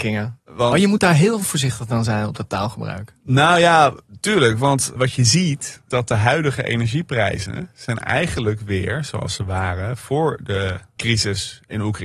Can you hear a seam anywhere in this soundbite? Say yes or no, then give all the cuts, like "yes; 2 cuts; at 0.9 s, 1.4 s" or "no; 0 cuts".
yes; 3 cuts; at 5.0 s, 5.9 s, 11.0 s